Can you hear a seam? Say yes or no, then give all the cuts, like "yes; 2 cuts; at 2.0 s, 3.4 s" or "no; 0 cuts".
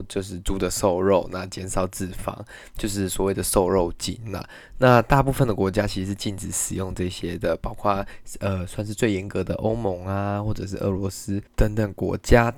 yes; 1 cut; at 11.5 s